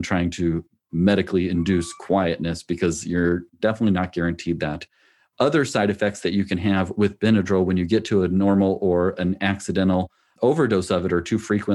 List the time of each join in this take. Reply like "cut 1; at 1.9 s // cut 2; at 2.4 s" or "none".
none

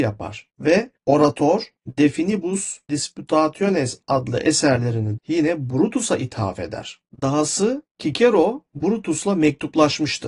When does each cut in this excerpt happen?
cut 1; at 2.9 s // cut 2; at 5.2 s

